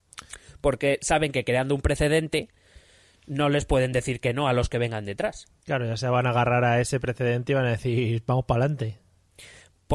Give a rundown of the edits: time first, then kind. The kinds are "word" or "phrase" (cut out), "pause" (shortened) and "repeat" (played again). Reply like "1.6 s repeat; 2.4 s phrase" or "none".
none